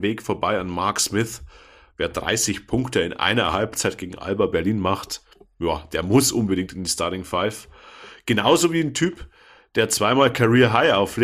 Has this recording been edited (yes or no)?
no